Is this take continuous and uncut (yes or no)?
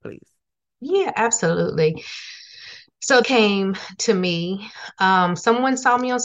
no